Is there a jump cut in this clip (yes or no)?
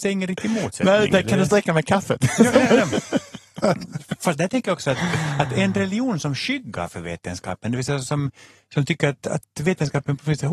no